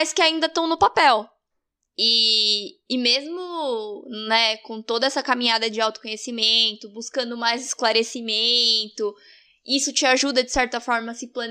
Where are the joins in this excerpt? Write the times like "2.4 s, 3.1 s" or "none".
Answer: none